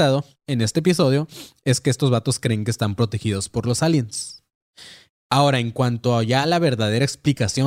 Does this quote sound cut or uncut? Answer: uncut